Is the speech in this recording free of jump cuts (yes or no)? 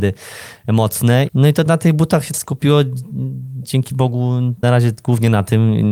no